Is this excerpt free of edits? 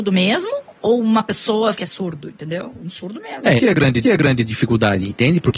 no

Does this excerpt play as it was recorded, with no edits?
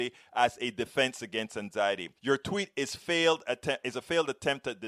no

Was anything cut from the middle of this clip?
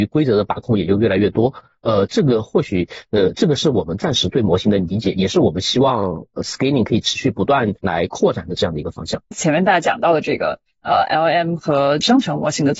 yes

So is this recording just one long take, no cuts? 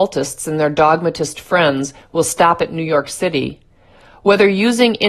yes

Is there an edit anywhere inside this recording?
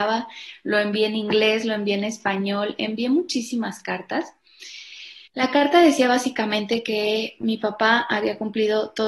yes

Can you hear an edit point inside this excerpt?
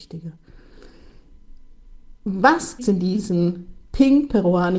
yes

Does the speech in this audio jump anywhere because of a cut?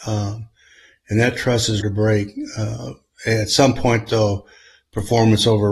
yes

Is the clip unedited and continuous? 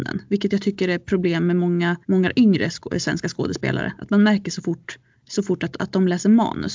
no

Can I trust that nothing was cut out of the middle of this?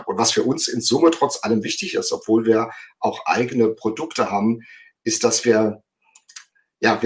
yes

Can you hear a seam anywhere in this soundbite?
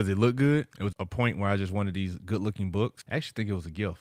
yes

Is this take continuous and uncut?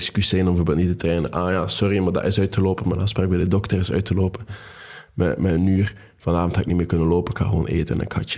yes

